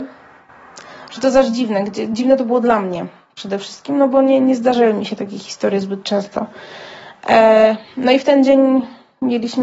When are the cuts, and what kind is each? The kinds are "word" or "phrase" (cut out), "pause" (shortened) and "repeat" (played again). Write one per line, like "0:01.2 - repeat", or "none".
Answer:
none